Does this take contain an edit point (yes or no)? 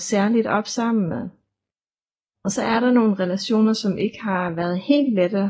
no